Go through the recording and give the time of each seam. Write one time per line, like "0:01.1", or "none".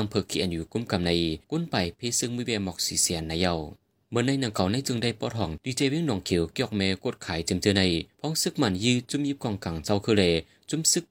0:01.4